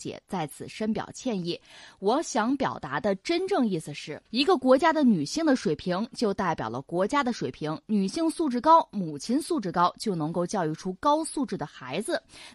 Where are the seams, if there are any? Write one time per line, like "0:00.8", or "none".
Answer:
0:04.3